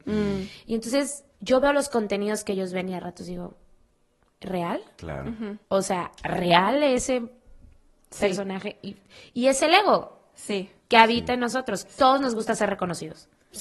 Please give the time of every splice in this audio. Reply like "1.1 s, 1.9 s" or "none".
1.3 s, 5.6 s, 10.8 s